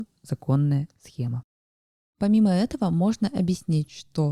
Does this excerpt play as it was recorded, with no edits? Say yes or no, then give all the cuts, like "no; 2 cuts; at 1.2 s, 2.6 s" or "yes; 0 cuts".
yes; 0 cuts